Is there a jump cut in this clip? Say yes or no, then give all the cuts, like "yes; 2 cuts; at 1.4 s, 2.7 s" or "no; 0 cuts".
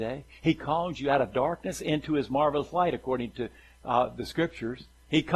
no; 0 cuts